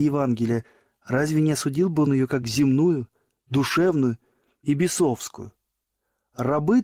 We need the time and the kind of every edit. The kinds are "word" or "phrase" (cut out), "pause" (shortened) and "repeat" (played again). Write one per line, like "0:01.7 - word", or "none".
none